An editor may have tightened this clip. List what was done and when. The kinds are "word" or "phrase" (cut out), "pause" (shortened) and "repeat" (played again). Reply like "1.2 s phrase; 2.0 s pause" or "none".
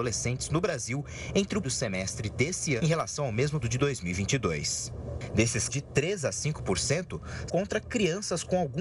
1.6 s word; 2.8 s word; 3.6 s word; 5.7 s word; 7.5 s word